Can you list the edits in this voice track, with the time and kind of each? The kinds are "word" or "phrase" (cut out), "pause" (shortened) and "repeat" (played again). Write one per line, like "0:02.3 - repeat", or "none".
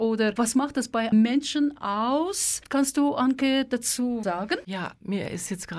0:01.1 - word
0:04.2 - word